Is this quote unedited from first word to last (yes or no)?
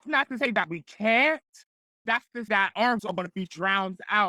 no